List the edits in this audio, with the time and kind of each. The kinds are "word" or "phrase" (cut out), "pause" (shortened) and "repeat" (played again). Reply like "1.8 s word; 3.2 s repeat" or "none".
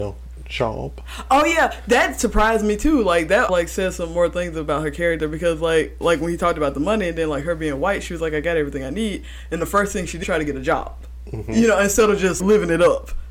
3.5 s word; 10.2 s word; 12.4 s word